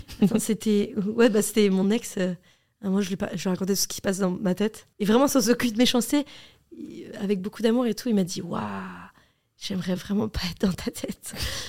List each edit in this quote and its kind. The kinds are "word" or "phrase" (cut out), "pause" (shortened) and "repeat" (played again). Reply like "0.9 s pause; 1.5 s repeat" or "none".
none